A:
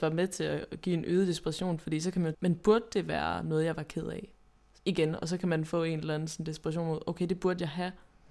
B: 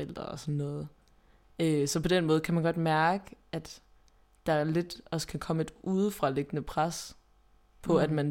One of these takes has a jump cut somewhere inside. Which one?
A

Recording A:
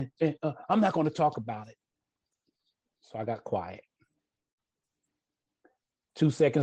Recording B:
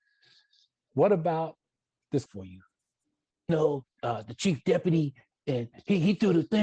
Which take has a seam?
B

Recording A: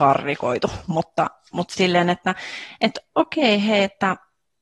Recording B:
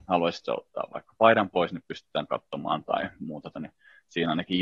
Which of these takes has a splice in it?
B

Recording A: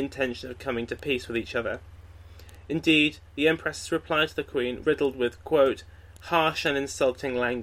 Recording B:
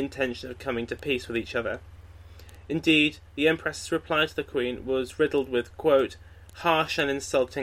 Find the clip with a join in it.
A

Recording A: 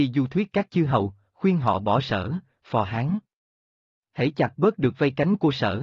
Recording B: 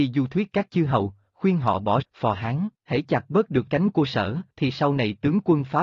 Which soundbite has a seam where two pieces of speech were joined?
B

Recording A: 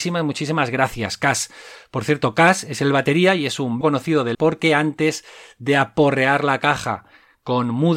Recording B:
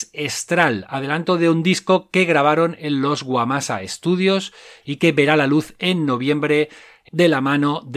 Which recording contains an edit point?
A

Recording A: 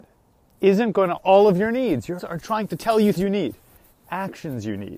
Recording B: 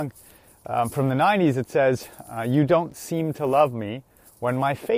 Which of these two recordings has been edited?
A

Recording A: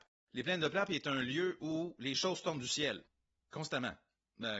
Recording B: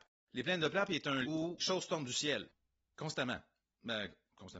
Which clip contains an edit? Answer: B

